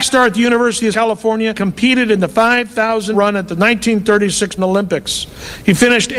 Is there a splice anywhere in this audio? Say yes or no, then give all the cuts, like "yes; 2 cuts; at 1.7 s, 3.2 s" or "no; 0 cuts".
yes; 4 cuts; at 0.9 s, 1.5 s, 3.1 s, 4.6 s